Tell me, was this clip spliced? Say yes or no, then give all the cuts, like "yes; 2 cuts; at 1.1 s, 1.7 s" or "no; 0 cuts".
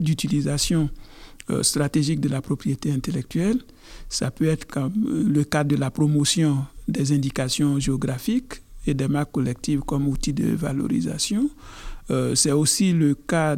no; 0 cuts